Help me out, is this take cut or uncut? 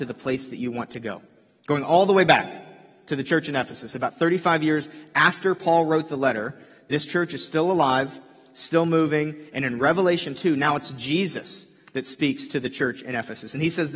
uncut